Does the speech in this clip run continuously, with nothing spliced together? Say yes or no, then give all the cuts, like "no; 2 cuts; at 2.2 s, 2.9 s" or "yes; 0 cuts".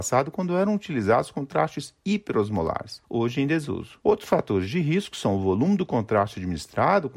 yes; 0 cuts